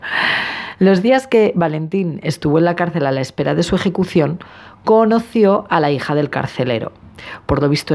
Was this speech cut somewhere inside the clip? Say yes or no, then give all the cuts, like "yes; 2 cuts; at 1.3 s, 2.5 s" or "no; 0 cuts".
no; 0 cuts